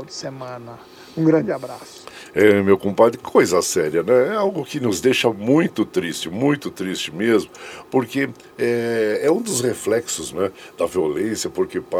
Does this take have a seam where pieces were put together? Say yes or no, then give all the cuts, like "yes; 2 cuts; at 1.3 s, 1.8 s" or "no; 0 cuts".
yes; 1 cut; at 10.3 s